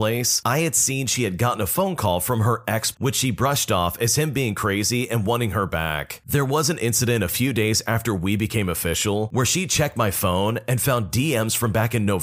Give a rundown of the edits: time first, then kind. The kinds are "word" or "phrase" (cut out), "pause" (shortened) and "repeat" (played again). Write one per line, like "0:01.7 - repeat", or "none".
0:02.9 - word